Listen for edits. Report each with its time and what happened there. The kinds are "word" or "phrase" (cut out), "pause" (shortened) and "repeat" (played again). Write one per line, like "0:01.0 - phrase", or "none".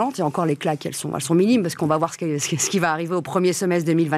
none